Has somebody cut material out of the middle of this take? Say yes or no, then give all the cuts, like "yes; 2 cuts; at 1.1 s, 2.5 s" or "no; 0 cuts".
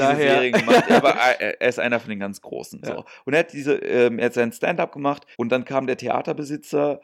yes; 1 cut; at 5.3 s